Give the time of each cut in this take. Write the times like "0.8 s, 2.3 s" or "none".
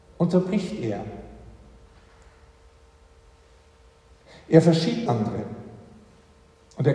5.1 s